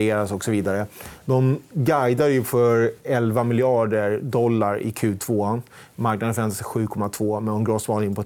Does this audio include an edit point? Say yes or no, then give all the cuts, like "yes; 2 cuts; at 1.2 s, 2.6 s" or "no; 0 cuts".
no; 0 cuts